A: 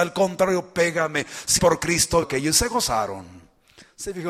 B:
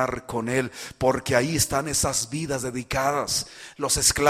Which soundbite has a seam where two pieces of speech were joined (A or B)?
A